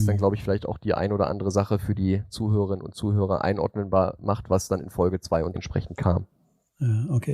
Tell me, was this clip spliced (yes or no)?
yes